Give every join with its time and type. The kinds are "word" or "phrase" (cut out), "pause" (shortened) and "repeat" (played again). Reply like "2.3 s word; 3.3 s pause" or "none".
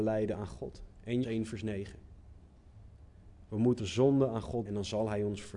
1.2 s word; 3.8 s word; 4.6 s word